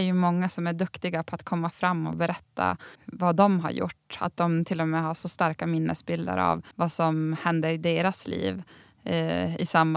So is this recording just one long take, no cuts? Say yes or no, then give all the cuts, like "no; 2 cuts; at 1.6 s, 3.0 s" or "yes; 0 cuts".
no; 2 cuts; at 3.0 s, 6.7 s